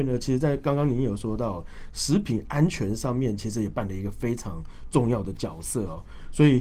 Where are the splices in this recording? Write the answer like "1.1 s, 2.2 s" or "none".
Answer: none